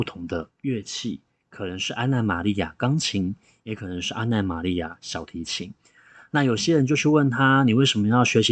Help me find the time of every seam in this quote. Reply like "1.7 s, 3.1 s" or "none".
none